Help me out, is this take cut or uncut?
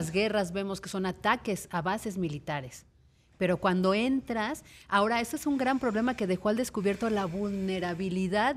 uncut